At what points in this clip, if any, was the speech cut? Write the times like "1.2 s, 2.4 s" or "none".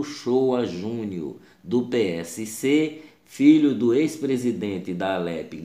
none